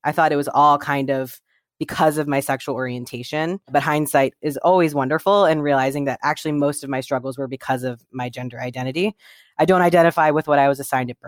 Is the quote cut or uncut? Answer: uncut